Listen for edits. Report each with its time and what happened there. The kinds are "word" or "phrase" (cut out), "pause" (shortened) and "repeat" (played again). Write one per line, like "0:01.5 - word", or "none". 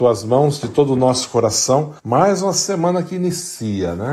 0:02.0 - pause